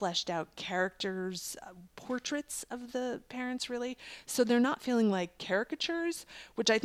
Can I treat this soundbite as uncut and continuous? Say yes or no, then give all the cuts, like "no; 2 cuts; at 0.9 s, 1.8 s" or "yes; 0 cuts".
yes; 0 cuts